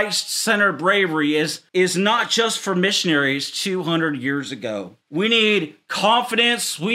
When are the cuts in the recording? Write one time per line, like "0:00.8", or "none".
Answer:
0:01.7
0:05.0